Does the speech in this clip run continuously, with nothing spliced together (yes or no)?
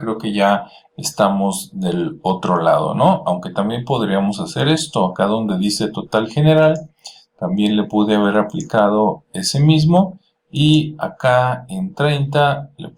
yes